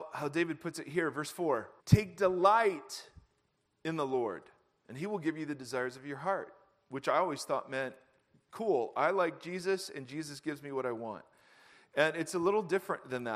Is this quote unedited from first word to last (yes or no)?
no